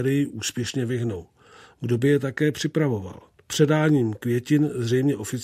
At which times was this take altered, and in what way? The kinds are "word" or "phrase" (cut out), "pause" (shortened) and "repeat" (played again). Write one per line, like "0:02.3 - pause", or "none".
0:03.4 - pause